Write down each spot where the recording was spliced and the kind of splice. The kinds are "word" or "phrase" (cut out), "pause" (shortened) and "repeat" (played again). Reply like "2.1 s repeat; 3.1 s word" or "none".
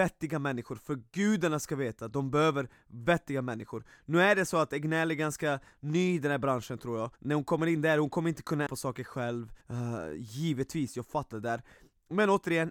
7.1 s pause; 8.7 s word; 9.6 s pause; 11.3 s phrase